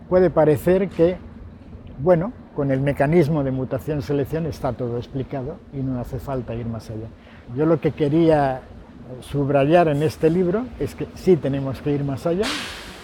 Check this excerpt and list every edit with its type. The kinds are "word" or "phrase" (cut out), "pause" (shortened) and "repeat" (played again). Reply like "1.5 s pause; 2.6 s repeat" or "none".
7.4 s pause

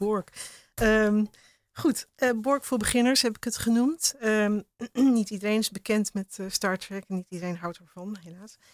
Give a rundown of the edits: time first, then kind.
none

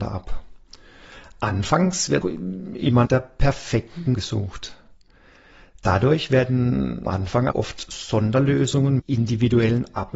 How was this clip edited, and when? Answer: 2.2 s word; 3.1 s word; 4.1 s word; 7.1 s word; 7.5 s word; 9.0 s word

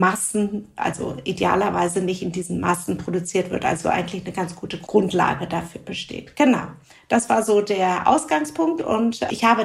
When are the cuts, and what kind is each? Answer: none

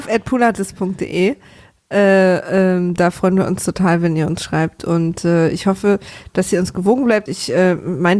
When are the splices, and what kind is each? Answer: 7.3 s word

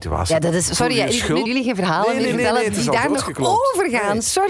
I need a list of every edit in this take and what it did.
1.5 s word

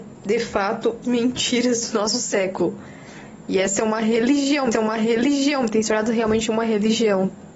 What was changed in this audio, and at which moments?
1.0 s phrase; 4.7 s repeat

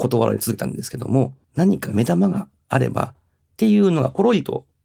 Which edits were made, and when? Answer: 1.4 s pause

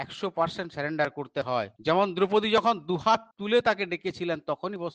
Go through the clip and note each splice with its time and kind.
1.8 s pause; 3.3 s pause

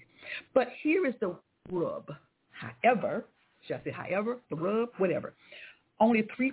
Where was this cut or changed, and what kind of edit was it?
none

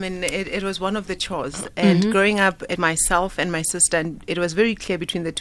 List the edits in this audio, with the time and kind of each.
2.8 s word

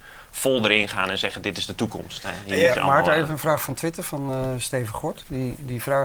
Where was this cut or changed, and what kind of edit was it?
none

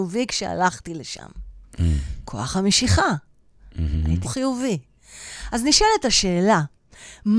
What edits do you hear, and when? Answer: 4.2 s phrase

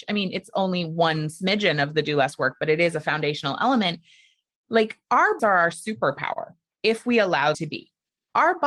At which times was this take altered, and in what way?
5.4 s word; 7.5 s word

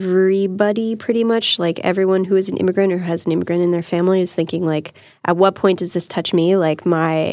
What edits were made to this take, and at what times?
none

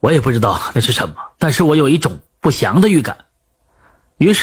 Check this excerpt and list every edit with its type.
1.3 s pause

